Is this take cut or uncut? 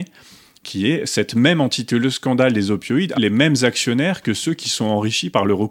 cut